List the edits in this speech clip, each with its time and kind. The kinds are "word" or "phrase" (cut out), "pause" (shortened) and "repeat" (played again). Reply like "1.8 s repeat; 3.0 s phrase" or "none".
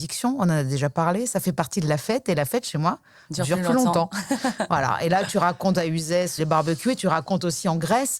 6.4 s word